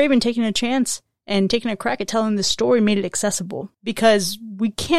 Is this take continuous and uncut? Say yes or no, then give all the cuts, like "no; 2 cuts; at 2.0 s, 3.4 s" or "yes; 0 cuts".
no; 1 cut; at 3.8 s